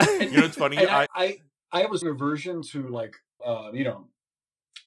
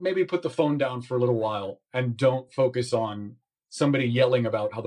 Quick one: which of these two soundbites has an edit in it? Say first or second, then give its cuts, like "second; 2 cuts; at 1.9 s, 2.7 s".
first; 3 cuts; at 1.1 s, 2.0 s, 3.4 s